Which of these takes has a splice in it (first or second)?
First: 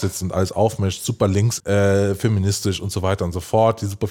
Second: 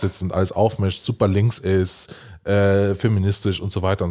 first